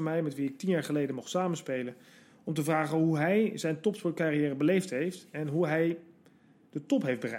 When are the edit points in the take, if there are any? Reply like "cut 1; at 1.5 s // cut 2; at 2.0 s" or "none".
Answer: none